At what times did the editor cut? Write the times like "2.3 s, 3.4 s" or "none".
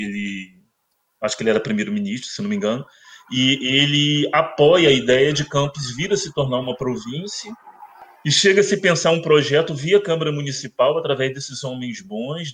8.2 s